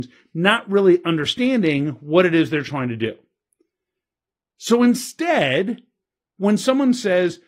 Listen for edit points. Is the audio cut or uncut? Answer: uncut